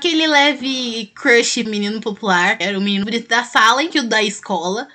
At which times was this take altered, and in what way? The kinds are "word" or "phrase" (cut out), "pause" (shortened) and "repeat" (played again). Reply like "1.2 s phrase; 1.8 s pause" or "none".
1.7 s word; 2.6 s word; 3.0 s word; 3.9 s word